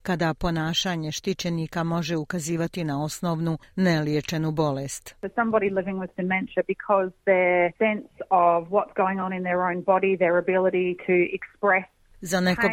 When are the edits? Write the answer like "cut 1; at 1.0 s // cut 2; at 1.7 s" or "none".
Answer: cut 1; at 7.7 s